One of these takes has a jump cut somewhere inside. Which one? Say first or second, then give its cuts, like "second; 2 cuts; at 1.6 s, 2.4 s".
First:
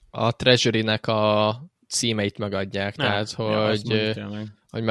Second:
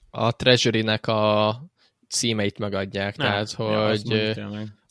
first; 1 cut; at 1.8 s